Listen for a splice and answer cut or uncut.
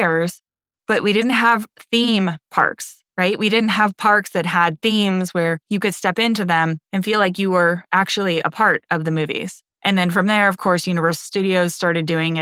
cut